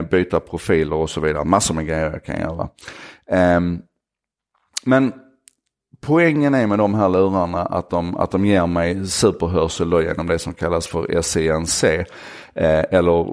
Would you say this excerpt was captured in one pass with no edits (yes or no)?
yes